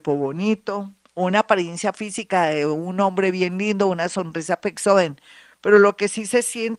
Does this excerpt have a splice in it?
no; 0 cuts

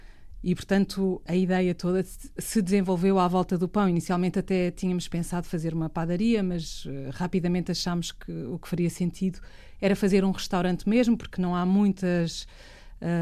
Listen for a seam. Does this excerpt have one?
no; 0 cuts

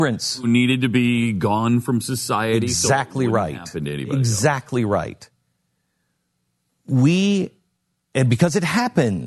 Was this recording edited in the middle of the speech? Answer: no; 0 cuts

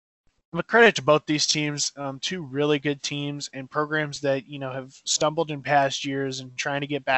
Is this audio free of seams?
yes; 0 cuts

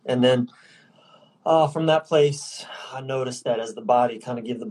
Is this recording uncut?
yes; 0 cuts

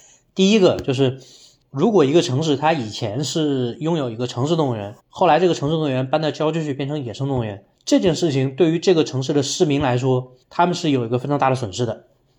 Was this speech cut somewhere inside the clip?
yes; 3 cuts; at 5.0 s, 7.7 s, 10.4 s

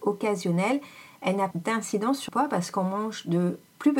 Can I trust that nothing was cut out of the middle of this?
no; 2 cuts; at 1.5 s, 2.3 s

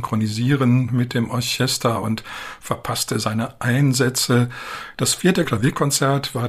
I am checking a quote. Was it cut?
no; 0 cuts

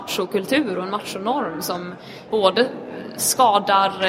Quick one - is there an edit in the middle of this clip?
yes; 1 cut; at 2.3 s

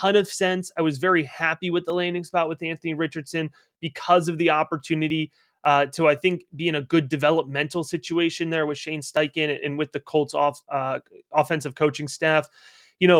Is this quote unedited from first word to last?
yes; 0 cuts

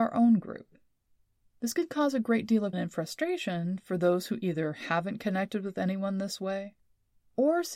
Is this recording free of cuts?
no; 1 cut; at 2.7 s

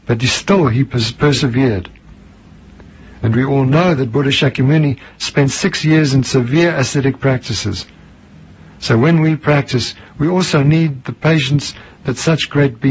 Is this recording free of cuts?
yes; 0 cuts

